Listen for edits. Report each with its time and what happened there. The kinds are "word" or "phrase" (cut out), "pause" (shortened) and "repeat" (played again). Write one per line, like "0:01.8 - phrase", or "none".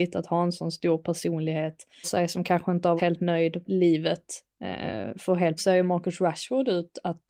0:02.0 - word
0:03.0 - word
0:03.6 - word
0:05.6 - word